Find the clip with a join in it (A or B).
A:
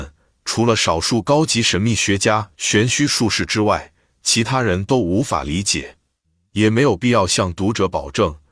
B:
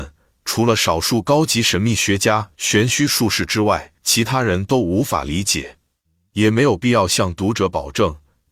B